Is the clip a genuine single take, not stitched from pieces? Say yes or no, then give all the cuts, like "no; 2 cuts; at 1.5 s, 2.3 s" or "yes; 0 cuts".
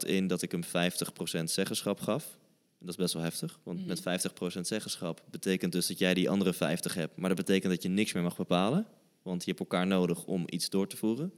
yes; 0 cuts